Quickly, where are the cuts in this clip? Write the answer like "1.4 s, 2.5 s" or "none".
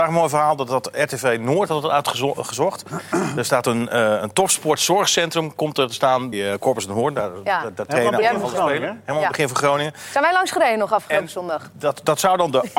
6.3 s